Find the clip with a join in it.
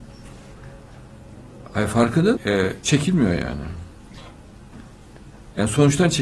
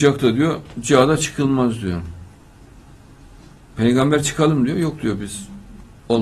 first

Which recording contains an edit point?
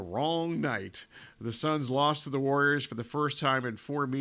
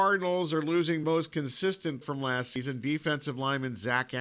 second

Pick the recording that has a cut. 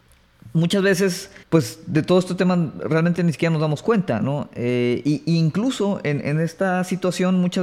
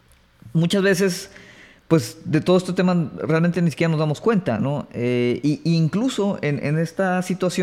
first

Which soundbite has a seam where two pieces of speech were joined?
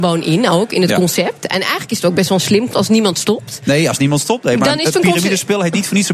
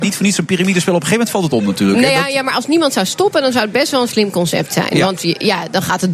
first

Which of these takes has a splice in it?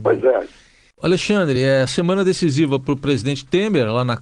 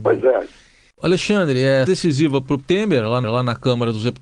second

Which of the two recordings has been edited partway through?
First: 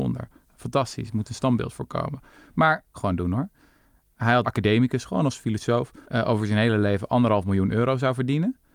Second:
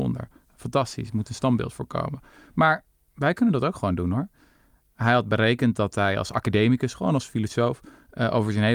first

